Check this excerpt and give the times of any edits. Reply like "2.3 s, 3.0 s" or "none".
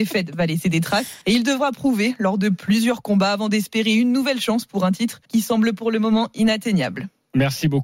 1.2 s, 5.2 s